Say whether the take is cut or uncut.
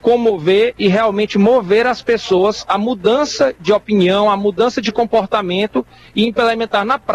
uncut